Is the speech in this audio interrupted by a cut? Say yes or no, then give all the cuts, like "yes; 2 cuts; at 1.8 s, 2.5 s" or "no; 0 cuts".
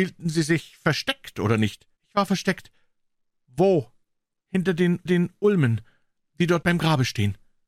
yes; 3 cuts; at 2.0 s, 5.1 s, 6.6 s